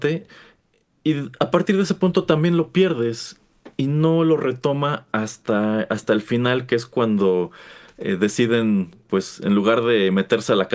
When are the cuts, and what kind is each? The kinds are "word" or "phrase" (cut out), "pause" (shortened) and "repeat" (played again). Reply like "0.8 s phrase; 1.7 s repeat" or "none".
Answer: 9.0 s pause